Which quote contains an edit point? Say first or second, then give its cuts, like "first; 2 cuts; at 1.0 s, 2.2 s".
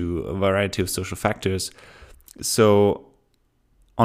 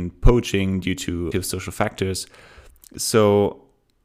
second; 1 cut; at 1.3 s